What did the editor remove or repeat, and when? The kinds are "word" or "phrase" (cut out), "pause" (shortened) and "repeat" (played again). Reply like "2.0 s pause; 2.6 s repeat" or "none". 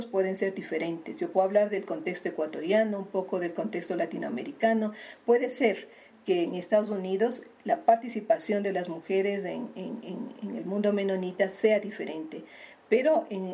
none

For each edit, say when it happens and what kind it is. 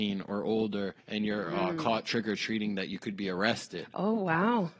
1.0 s pause

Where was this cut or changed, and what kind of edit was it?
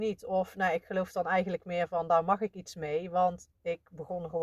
3.5 s word

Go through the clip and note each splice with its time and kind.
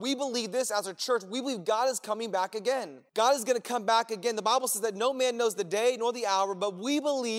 3.1 s pause

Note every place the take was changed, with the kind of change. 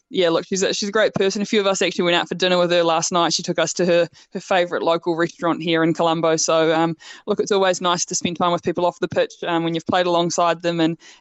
none

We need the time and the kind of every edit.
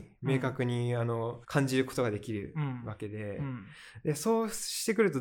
1.4 s pause

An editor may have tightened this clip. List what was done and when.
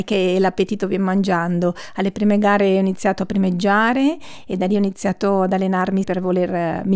6.0 s word

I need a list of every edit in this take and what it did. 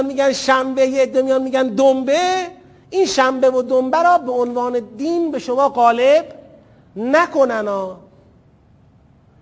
none

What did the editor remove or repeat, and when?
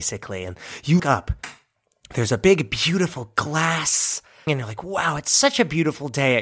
1.0 s word; 4.5 s word

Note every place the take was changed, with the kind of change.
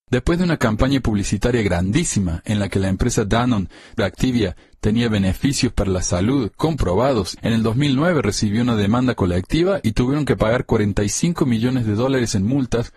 4.0 s phrase; 7.4 s phrase

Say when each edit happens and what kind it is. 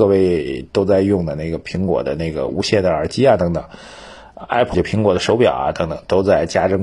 4.7 s word

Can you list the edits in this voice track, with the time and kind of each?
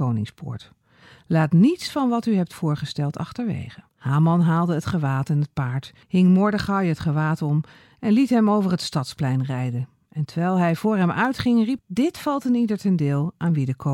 3.9 s pause; 6.0 s pause; 11.8 s word

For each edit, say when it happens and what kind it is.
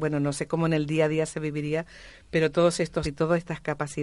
3.0 s word

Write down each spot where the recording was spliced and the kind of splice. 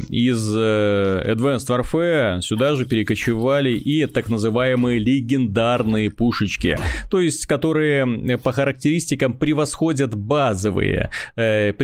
none

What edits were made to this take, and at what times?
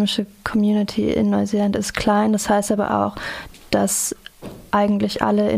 none

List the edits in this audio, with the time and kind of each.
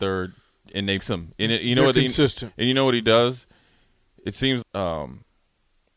1.0 s word; 4.6 s word

